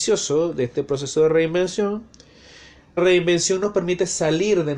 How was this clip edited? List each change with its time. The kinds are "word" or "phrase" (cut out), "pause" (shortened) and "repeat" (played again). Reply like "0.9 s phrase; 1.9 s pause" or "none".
3.0 s word